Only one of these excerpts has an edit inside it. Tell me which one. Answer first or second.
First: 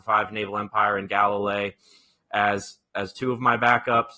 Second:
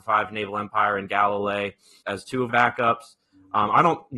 second